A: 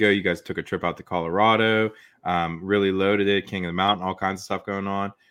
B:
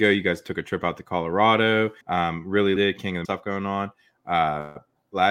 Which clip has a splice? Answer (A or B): B